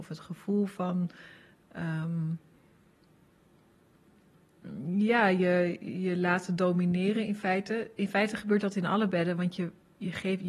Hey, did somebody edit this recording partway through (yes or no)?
no